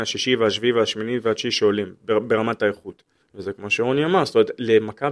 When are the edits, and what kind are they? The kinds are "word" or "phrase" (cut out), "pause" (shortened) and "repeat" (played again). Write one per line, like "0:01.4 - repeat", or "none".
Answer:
0:03.2 - pause